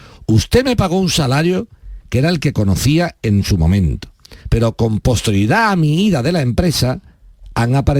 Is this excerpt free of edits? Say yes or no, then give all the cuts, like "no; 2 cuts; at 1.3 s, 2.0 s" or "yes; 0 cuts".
no; 1 cut; at 4.4 s